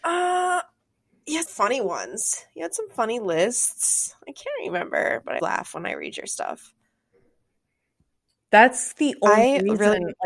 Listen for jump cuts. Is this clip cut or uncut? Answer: cut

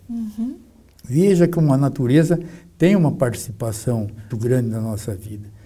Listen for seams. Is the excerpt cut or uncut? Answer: cut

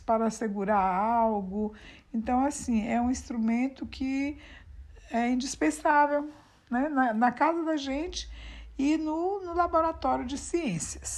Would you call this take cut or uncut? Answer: uncut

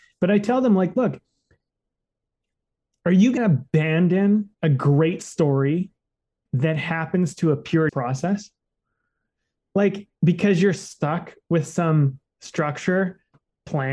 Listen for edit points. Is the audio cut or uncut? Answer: cut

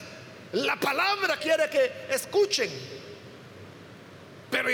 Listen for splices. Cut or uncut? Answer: cut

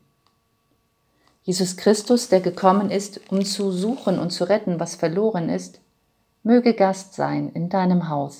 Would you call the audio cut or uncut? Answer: uncut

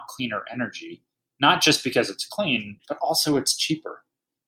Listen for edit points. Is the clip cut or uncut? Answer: uncut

